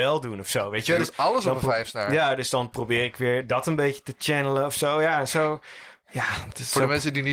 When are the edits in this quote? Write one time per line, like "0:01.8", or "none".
none